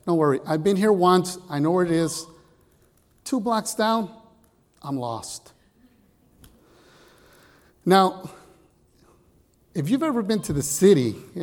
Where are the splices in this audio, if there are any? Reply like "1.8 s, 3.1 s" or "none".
none